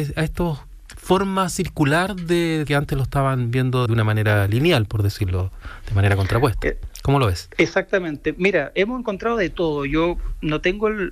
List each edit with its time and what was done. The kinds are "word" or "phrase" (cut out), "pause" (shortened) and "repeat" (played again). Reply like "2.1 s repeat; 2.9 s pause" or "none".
2.7 s phrase; 3.9 s word